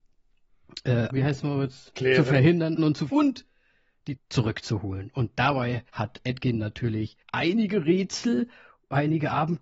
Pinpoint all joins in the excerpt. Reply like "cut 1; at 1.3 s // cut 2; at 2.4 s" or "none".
cut 1; at 1.1 s // cut 2; at 2.8 s // cut 3; at 3.1 s // cut 4; at 4.2 s // cut 5; at 5.9 s // cut 6; at 7.2 s